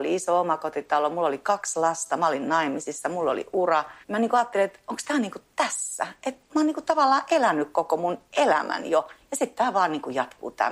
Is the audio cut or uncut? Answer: cut